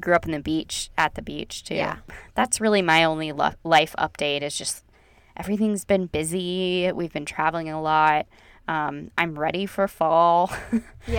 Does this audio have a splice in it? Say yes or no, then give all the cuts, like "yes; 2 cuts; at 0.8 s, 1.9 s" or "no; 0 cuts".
no; 0 cuts